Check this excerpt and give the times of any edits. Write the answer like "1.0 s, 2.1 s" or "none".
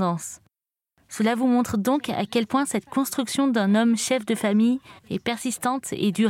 5.0 s